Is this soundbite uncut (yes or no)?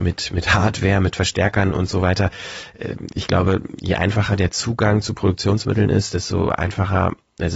yes